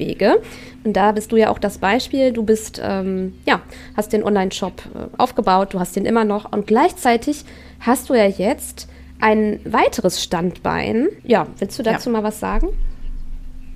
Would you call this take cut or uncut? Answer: cut